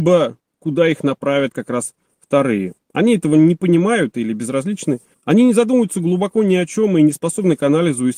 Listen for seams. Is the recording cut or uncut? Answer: cut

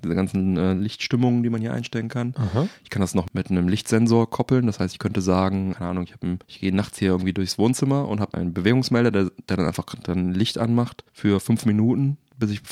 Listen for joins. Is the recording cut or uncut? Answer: cut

